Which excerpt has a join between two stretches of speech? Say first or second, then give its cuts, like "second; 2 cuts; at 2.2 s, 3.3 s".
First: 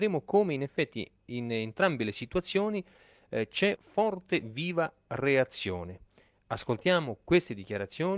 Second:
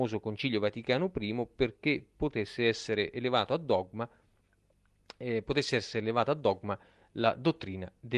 first; 1 cut; at 3.8 s